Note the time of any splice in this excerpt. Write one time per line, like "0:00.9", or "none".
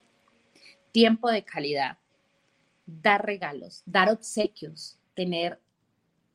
none